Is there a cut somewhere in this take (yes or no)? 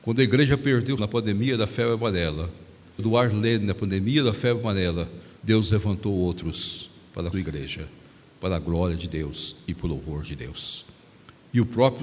yes